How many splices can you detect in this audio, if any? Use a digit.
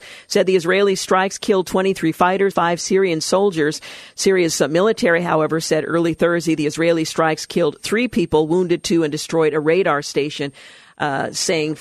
1